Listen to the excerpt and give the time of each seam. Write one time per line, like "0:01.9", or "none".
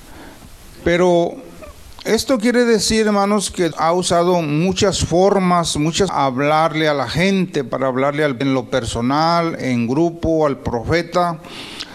0:03.7
0:06.1
0:08.4

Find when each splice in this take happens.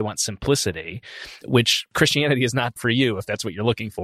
0:01.9
0:02.8

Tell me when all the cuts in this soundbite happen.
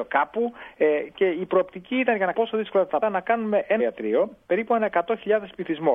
0:02.3
0:03.0
0:03.8

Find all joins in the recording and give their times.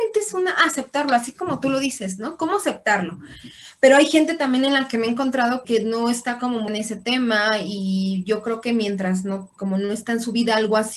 0:05.6
0:06.7
0:09.6

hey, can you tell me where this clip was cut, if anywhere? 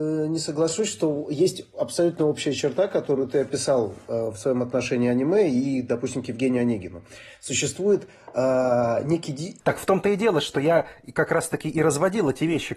none

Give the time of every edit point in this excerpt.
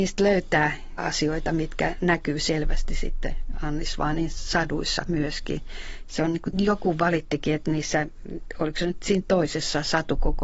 0:01.0
0:06.5

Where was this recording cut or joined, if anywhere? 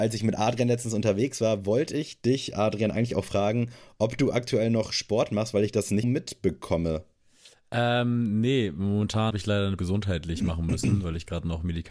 0:06.0
0:09.3
0:09.8

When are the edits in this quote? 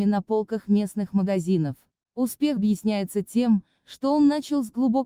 0:02.6

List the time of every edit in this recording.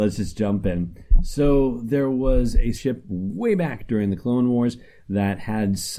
0:02.8

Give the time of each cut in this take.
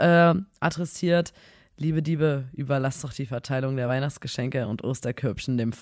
none

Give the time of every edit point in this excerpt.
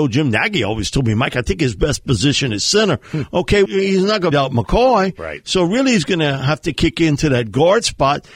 0:03.7
0:04.3

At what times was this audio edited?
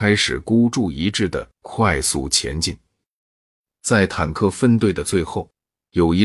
none

